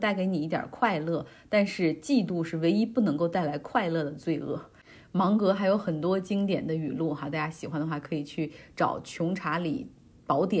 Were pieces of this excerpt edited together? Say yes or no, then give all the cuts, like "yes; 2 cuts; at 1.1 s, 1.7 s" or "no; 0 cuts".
no; 0 cuts